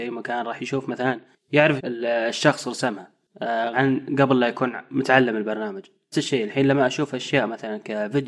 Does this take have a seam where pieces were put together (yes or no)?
yes